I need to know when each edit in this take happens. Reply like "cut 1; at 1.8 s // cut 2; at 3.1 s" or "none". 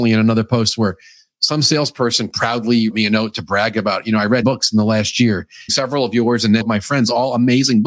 cut 1; at 2.9 s // cut 2; at 4.4 s // cut 3; at 5.7 s // cut 4; at 6.6 s